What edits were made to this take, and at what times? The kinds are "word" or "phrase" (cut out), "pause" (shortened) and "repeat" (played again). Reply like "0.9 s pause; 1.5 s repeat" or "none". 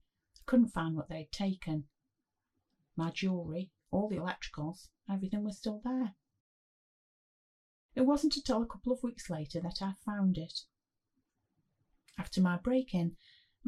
none